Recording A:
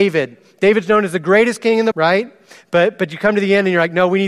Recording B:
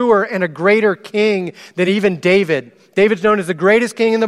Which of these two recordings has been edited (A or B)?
A